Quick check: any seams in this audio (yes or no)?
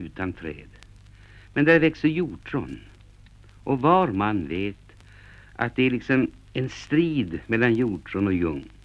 no